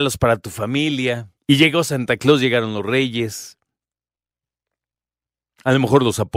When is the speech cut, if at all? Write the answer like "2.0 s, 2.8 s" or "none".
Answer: 1.4 s